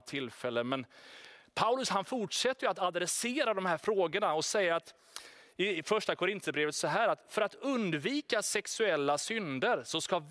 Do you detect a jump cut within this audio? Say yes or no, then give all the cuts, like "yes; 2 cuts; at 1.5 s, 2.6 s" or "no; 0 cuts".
no; 0 cuts